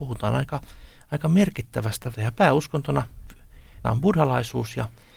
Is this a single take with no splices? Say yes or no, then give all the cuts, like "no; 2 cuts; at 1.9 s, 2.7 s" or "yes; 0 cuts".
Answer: no; 2 cuts; at 2.1 s, 3.8 s